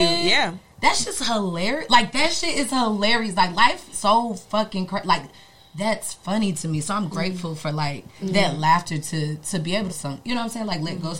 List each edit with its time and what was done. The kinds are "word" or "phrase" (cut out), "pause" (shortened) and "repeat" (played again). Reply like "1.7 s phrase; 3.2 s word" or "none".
3.9 s word; 8.1 s pause; 9.9 s phrase